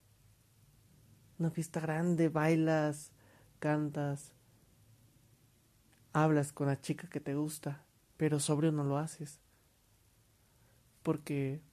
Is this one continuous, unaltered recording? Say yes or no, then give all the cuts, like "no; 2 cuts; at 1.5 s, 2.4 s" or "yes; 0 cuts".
yes; 0 cuts